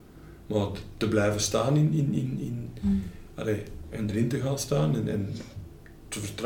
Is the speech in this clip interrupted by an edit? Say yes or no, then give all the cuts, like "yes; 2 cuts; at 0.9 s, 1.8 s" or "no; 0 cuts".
no; 0 cuts